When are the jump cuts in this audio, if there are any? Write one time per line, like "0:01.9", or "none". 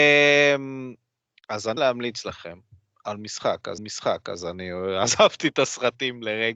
0:01.8
0:03.8